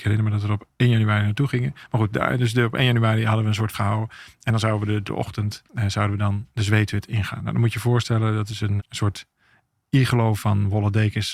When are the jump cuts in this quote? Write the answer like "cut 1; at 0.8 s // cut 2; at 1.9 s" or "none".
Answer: cut 1; at 3.7 s // cut 2; at 5.1 s // cut 3; at 5.7 s // cut 4; at 8.8 s